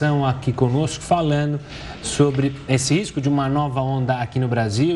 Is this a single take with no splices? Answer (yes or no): yes